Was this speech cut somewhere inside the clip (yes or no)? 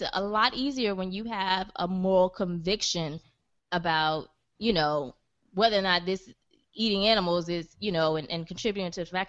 no